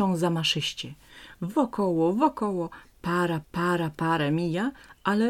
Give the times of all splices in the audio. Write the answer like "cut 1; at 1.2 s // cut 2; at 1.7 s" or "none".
cut 1; at 3.4 s